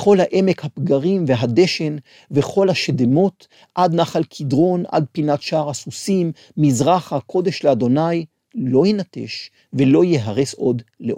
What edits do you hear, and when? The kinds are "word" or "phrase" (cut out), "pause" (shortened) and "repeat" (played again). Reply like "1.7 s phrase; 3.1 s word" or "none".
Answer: none